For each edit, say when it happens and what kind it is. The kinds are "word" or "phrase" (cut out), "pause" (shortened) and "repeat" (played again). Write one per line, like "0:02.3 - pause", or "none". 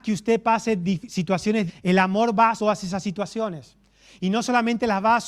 0:01.7 - word
0:02.6 - word